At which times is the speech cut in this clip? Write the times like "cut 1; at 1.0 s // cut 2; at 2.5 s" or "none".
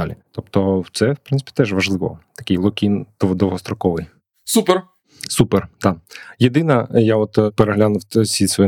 none